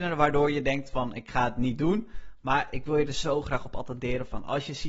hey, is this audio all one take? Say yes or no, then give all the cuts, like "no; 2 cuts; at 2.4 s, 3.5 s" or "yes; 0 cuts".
yes; 0 cuts